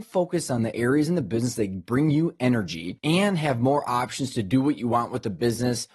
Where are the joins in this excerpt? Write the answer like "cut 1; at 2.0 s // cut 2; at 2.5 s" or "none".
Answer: none